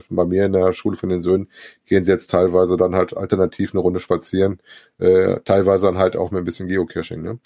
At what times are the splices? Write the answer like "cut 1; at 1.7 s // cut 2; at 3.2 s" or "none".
none